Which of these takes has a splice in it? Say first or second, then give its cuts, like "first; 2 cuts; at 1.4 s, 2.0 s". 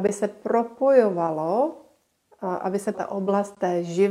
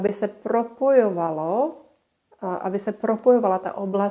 first; 1 cut; at 2.9 s